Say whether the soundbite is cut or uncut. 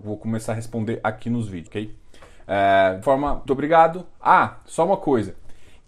cut